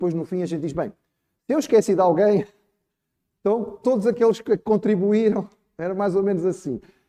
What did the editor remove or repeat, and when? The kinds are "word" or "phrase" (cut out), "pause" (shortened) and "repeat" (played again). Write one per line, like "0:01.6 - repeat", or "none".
none

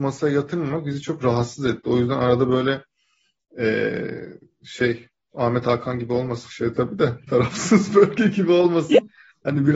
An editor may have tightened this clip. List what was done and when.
none

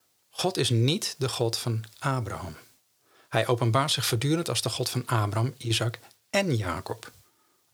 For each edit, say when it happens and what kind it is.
none

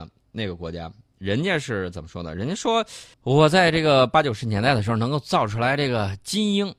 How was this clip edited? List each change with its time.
0:03.1 - pause

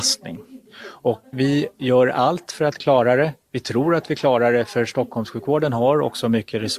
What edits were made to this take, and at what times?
0:01.3 - word

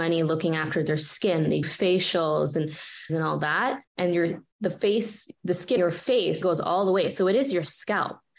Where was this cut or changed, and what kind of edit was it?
0:01.6 - word
0:03.1 - phrase
0:03.9 - pause
0:04.5 - pause
0:05.8 - word
0:06.4 - word

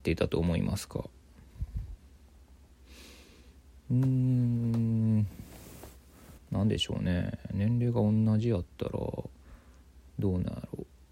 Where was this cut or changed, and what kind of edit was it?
0:06.4 - pause

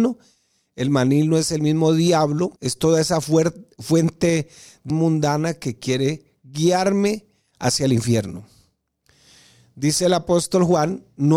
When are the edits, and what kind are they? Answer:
0:02.6 - pause
0:04.9 - word

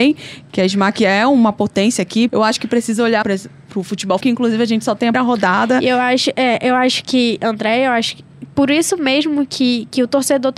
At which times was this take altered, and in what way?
0:02.3 - word
0:03.2 - word
0:04.2 - word
0:05.1 - word

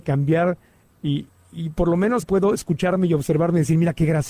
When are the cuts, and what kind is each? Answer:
0:02.2 - word

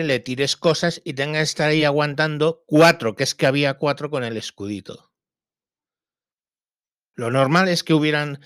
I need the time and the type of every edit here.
none

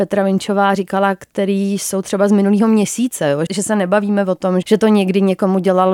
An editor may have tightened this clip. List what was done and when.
0:03.5 - word
0:04.6 - word

